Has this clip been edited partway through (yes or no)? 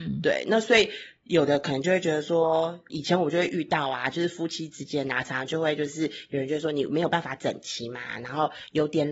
yes